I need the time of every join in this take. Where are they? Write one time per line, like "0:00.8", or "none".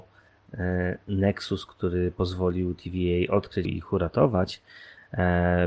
0:03.6